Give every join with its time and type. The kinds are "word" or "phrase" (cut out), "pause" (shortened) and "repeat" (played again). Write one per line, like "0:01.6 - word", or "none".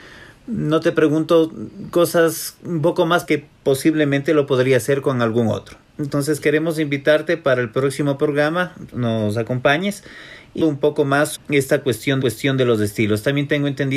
0:03.2 - word
0:08.9 - word
0:10.6 - phrase
0:11.4 - word
0:12.2 - repeat